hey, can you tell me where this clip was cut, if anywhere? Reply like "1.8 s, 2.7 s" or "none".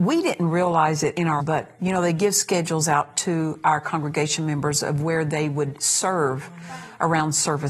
1.4 s